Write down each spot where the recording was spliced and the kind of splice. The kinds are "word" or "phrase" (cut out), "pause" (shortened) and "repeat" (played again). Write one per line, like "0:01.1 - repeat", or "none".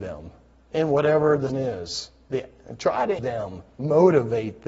0:01.5 - word
0:03.2 - word